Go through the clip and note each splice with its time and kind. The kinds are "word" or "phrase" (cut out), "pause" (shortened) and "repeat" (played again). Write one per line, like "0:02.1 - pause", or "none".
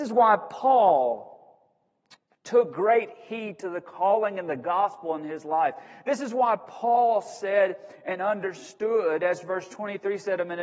none